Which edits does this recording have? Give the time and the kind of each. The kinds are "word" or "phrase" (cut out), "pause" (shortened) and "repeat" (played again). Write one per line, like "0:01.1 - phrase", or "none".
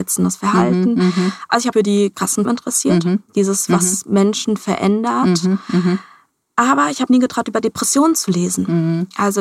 0:01.7 - word
0:02.1 - word
0:02.4 - word
0:03.7 - word
0:07.1 - word